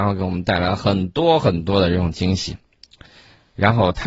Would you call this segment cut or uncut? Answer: uncut